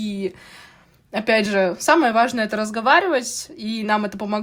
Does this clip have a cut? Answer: no; 0 cuts

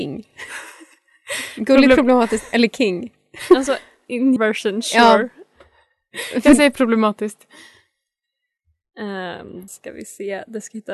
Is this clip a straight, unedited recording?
no; 2 cuts; at 4.4 s, 9.7 s

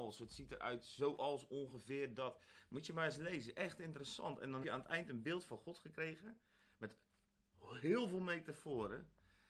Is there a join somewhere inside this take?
yes; 1 cut; at 4.6 s

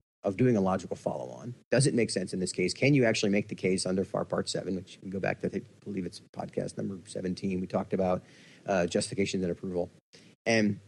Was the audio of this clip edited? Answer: no; 0 cuts

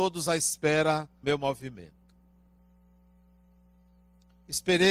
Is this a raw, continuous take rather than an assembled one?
no; 1 cut; at 1.2 s

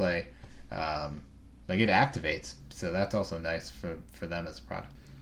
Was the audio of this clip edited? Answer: no; 0 cuts

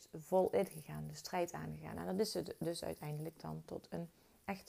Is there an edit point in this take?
no; 0 cuts

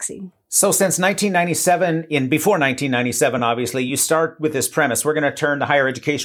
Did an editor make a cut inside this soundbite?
no; 0 cuts

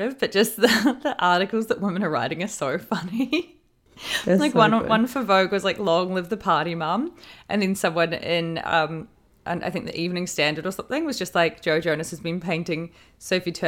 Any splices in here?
no; 0 cuts

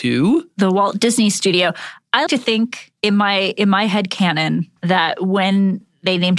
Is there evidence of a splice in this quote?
yes; 3 cuts; at 2.3 s, 3.0 s, 4.8 s

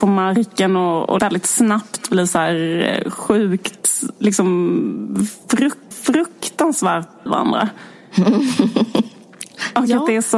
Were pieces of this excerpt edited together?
yes; 3 cuts; at 1.2 s, 5.9 s, 7.3 s

